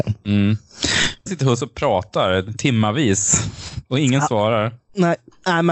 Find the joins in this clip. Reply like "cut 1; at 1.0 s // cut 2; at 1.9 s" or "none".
cut 1; at 1.3 s